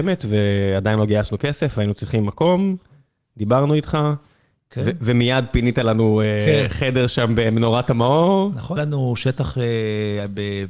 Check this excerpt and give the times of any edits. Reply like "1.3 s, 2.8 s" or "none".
8.8 s